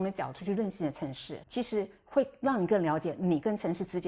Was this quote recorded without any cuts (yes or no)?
no